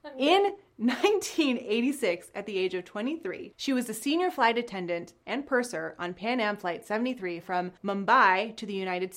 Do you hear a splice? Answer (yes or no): yes